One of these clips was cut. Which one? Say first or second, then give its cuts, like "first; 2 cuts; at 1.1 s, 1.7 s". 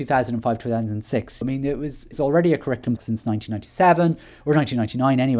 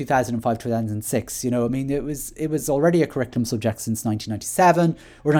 first; 3 cuts; at 1.4 s, 2.1 s, 3.0 s